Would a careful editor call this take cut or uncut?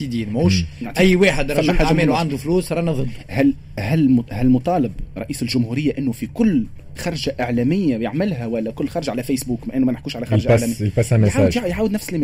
uncut